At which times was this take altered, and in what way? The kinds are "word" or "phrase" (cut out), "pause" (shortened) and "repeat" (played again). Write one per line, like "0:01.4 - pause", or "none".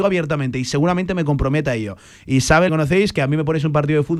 0:02.7 - phrase